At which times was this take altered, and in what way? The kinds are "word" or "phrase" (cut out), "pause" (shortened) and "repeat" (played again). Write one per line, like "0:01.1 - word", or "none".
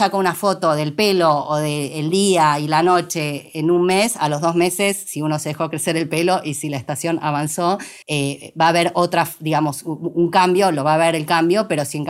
0:08.0 - pause